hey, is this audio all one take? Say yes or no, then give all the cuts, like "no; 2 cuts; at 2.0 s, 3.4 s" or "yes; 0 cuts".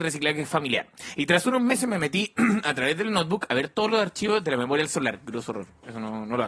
yes; 0 cuts